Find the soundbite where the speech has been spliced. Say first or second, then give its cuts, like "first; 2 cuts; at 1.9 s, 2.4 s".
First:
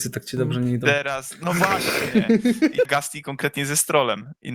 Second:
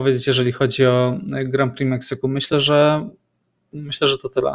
first; 1 cut; at 2.8 s